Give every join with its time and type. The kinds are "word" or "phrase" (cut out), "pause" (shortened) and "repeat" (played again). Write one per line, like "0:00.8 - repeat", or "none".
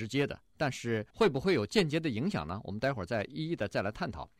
0:01.1 - pause